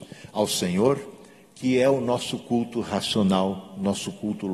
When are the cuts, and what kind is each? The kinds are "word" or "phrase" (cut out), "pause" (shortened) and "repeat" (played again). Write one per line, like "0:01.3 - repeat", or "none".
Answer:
none